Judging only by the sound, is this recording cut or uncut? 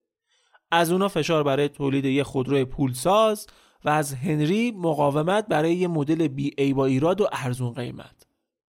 uncut